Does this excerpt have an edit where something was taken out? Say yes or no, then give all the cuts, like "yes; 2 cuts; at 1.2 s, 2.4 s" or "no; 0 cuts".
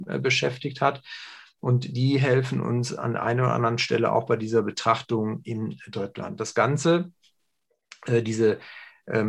no; 0 cuts